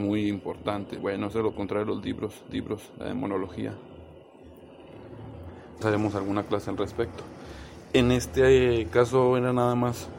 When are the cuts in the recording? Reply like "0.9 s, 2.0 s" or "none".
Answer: 1.0 s, 1.5 s, 2.5 s, 5.8 s